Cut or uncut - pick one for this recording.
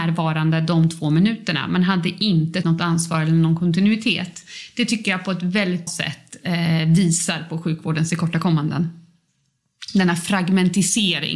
cut